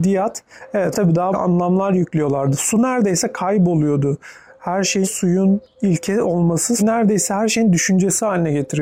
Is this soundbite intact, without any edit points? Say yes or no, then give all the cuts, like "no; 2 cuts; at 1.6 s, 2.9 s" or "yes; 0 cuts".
no; 4 cuts; at 0.9 s, 1.3 s, 5.0 s, 6.8 s